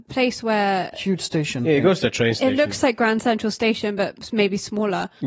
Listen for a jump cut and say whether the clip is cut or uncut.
uncut